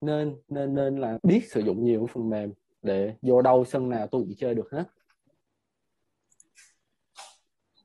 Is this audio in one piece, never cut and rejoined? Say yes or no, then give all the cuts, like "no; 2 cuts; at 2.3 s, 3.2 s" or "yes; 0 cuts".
no; 1 cut; at 1.2 s